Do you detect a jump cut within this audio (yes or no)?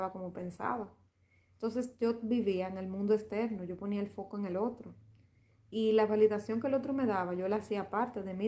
no